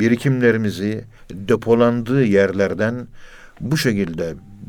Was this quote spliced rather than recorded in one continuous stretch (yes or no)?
yes